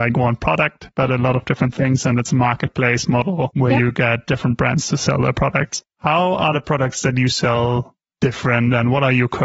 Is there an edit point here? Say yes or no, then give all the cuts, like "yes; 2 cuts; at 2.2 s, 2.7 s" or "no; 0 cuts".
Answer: no; 0 cuts